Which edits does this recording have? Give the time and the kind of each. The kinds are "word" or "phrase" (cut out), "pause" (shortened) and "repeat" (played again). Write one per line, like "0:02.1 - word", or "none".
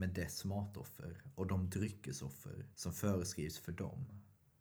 0:02.7 - pause